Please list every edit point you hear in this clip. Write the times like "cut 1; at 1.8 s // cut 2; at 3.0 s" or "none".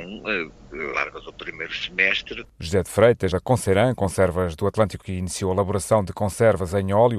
cut 1; at 0.9 s // cut 2; at 3.3 s // cut 3; at 5.0 s